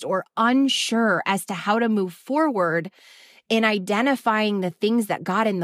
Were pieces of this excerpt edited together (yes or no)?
no